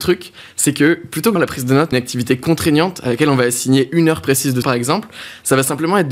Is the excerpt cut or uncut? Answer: cut